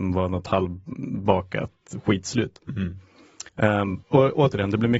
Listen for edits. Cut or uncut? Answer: cut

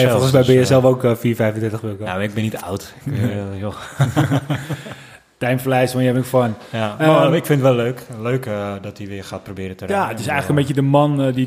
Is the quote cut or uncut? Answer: uncut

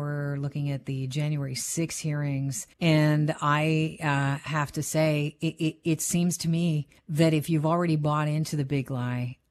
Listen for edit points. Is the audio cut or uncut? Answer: cut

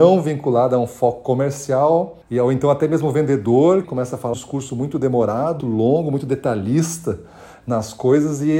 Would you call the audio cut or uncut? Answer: cut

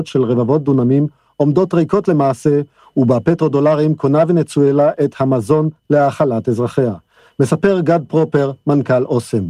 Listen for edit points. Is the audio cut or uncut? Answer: uncut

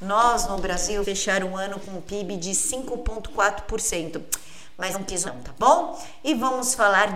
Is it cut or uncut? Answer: cut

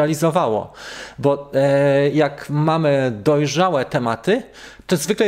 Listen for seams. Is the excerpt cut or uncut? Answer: uncut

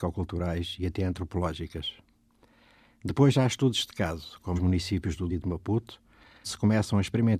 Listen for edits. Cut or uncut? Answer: cut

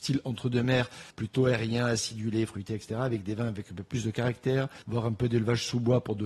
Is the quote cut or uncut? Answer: cut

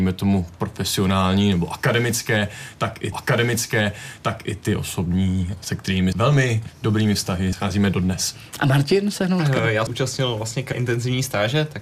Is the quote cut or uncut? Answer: cut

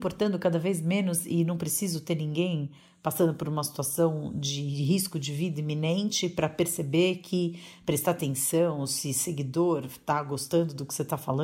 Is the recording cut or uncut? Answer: uncut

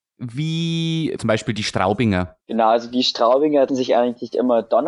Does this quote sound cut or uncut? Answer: cut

